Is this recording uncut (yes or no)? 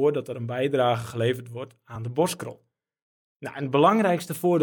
yes